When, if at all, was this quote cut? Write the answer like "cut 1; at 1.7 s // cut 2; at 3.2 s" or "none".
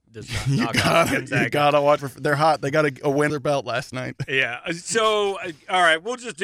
cut 1; at 2.0 s // cut 2; at 3.3 s

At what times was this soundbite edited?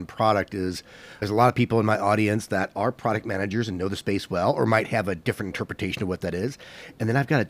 none

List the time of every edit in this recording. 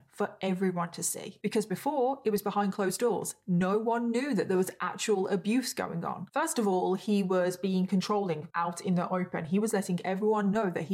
none

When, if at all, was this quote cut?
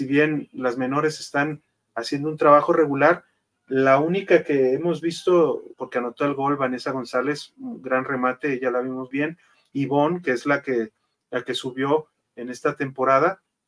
cut 1; at 5.7 s // cut 2; at 9.1 s

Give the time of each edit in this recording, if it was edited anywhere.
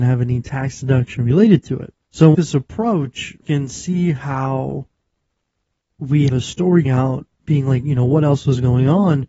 cut 1; at 2.0 s // cut 2; at 2.3 s // cut 3; at 3.4 s // cut 4; at 6.3 s // cut 5; at 6.8 s

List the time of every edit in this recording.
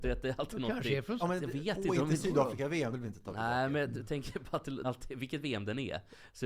cut 1; at 1.2 s // cut 2; at 2.9 s // cut 3; at 4.8 s

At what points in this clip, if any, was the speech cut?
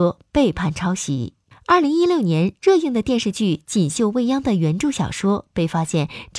cut 1; at 1.5 s

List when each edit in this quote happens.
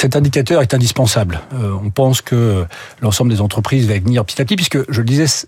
none

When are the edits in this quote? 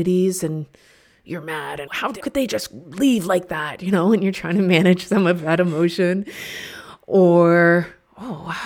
cut 1; at 1.9 s // cut 2; at 2.2 s

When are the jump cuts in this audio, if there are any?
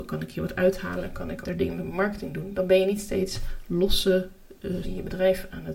cut 1; at 1.4 s // cut 2; at 4.8 s

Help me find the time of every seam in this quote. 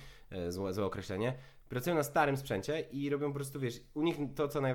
none

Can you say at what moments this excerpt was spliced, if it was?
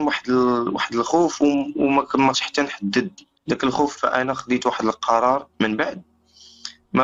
cut 1; at 2.3 s // cut 2; at 3.4 s // cut 3; at 4.0 s // cut 4; at 5.5 s

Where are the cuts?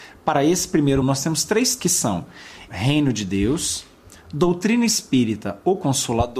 cut 1; at 1.0 s // cut 2; at 1.8 s // cut 3; at 2.7 s

